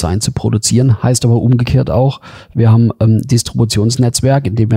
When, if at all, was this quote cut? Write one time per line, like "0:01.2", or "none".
none